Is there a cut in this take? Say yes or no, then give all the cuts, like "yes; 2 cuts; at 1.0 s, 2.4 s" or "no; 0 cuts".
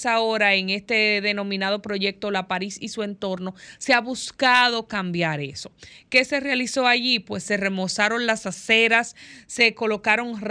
no; 0 cuts